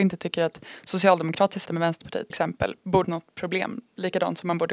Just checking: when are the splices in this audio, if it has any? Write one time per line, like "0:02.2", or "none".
0:01.6
0:02.3
0:03.0